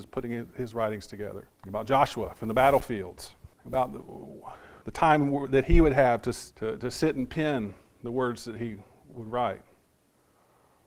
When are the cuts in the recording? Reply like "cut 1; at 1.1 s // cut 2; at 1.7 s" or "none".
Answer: cut 1; at 1.5 s // cut 2; at 3.5 s // cut 3; at 4.8 s // cut 4; at 6.5 s